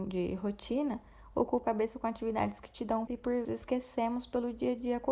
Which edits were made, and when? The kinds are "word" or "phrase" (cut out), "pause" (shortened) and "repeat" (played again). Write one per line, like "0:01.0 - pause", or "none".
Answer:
0:01.6 - word
0:03.1 - word
0:03.4 - word